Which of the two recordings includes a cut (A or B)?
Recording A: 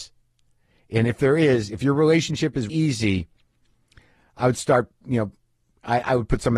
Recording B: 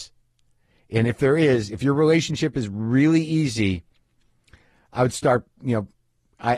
A